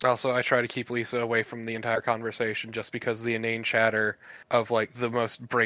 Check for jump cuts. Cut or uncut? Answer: cut